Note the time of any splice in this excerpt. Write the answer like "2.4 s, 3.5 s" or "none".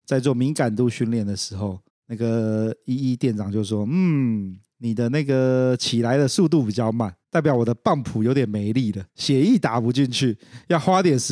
9.1 s

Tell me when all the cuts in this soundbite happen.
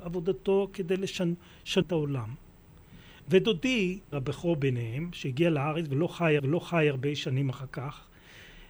1.8 s, 4.1 s, 6.4 s

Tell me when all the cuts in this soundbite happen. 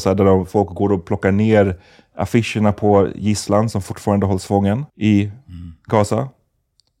4.9 s

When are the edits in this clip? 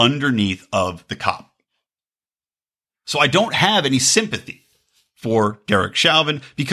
none

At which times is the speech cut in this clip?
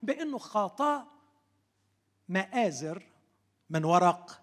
none

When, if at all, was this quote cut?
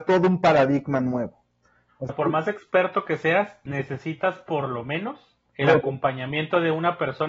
2.1 s, 5.5 s

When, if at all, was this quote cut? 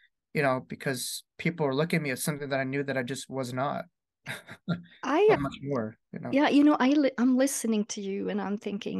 5.3 s

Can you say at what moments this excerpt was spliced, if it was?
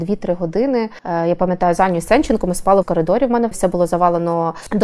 2.8 s, 3.5 s

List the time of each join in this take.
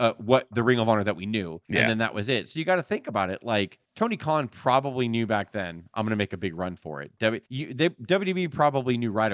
1.6 s, 3.8 s, 7.5 s

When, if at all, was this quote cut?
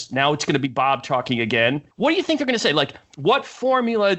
1.9 s

